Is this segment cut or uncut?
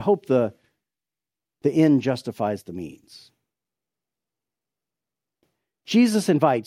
uncut